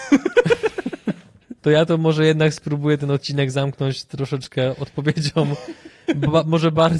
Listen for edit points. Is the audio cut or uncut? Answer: cut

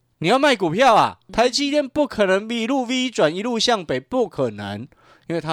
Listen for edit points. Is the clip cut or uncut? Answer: cut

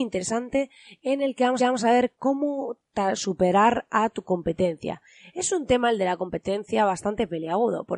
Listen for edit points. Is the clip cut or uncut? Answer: cut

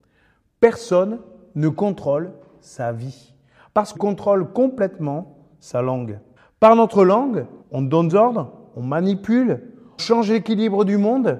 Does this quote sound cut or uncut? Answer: cut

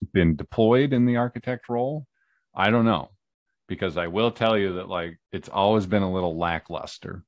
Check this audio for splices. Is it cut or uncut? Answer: uncut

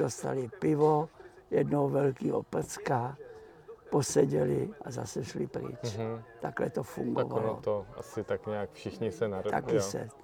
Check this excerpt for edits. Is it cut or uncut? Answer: uncut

